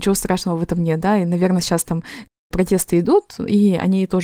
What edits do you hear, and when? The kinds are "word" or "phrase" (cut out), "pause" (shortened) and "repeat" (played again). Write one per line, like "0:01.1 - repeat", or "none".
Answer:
none